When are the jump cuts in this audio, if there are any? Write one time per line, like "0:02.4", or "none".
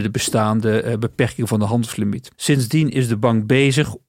0:02.3